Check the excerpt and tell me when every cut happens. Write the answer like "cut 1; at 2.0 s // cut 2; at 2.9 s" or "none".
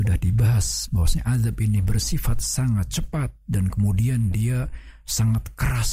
none